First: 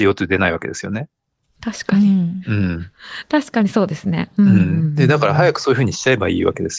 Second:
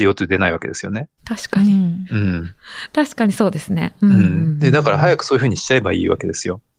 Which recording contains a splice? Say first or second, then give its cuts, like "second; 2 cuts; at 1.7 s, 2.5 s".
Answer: second; 1 cut; at 1.2 s